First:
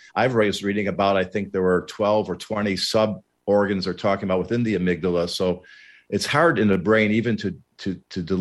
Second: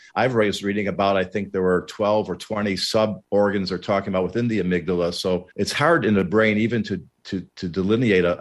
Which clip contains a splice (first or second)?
second